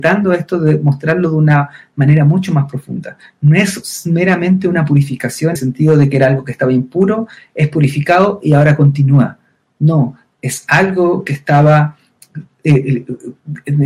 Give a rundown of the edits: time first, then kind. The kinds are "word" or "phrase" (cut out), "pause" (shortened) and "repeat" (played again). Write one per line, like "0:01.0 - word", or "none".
0:05.6 - phrase